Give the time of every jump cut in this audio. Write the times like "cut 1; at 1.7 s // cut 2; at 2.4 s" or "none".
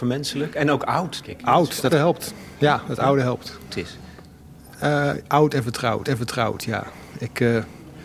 cut 1; at 1.2 s // cut 2; at 1.9 s // cut 3; at 3.7 s // cut 4; at 6.0 s